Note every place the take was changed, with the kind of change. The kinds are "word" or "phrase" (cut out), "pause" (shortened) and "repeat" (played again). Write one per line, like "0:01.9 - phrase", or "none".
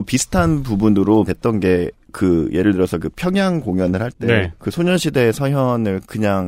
0:01.3 - phrase
0:04.5 - word